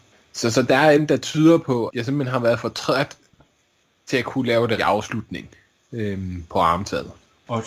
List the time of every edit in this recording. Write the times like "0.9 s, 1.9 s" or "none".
1.0 s, 1.9 s, 4.8 s